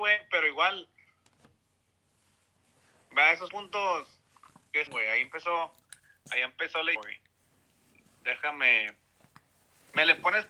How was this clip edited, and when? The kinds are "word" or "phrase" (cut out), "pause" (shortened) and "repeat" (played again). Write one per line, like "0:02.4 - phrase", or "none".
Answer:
0:03.5 - word
0:04.9 - word
0:07.0 - word